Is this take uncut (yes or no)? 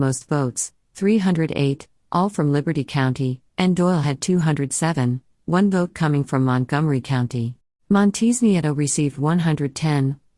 no